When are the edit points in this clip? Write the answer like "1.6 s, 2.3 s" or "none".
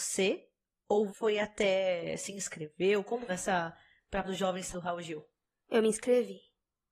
1.1 s, 3.3 s, 4.2 s, 4.7 s